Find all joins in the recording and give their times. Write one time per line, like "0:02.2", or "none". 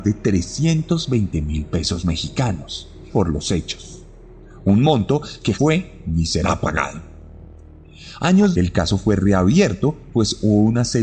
0:03.1
0:05.5
0:08.5